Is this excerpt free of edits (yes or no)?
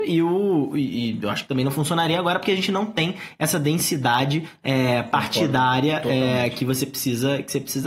yes